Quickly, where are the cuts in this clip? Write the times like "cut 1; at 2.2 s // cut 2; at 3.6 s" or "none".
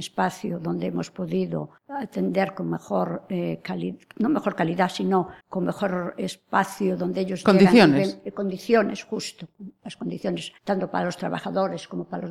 cut 1; at 1.8 s // cut 2; at 5.4 s // cut 3; at 10.6 s